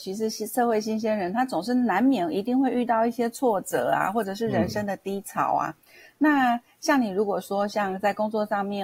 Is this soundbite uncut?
yes; 0 cuts

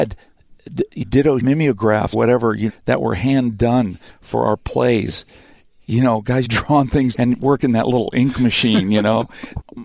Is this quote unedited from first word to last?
no; 6 cuts; at 1.0 s, 1.4 s, 2.1 s, 2.7 s, 6.4 s, 7.1 s

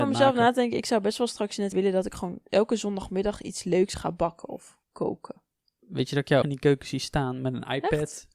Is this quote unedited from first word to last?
no; 3 cuts; at 1.7 s, 4.8 s, 6.4 s

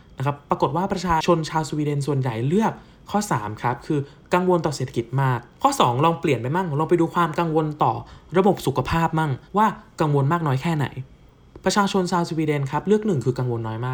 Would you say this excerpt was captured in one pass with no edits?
no; 1 cut; at 9.4 s

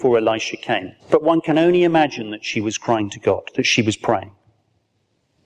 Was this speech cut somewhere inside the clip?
yes; 1 cut; at 1.0 s

